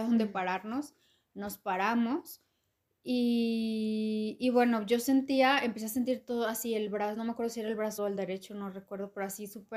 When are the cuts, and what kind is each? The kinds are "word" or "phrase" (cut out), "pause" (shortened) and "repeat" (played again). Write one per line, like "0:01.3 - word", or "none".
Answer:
0:08.0 - word